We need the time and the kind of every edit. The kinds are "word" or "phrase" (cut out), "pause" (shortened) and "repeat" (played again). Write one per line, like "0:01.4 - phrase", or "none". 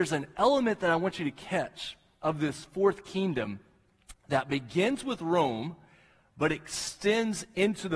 none